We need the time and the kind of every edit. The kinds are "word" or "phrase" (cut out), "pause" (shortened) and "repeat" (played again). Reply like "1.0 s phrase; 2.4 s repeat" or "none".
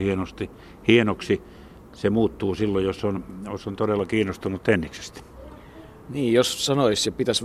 none